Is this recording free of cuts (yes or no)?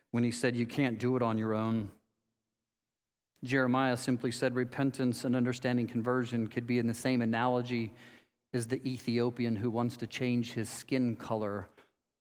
yes